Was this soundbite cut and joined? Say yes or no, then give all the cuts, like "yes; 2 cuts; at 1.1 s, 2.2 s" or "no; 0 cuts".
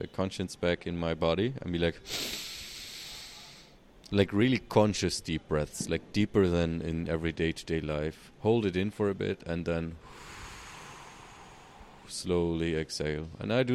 no; 0 cuts